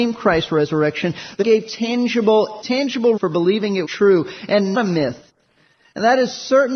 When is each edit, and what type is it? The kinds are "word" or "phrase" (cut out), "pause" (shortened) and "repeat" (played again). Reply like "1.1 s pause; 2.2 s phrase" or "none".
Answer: 1.4 s word; 2.6 s word; 3.2 s word; 3.8 s word; 4.7 s word